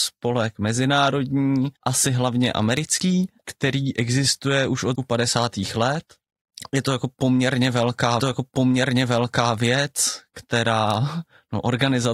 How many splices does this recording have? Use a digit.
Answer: 3